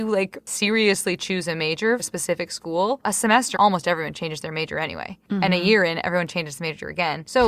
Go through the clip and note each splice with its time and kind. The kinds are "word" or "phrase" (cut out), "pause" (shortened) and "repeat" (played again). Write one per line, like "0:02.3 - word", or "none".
0:02.0 - word
0:03.0 - word
0:03.5 - word